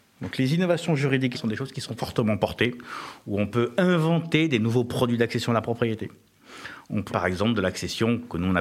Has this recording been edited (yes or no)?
yes